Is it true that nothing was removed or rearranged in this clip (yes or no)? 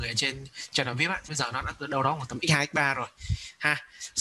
no